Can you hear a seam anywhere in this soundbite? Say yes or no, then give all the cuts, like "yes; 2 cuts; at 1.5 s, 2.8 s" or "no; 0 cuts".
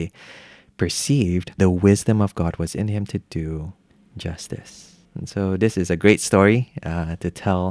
yes; 2 cuts; at 1.6 s, 5.0 s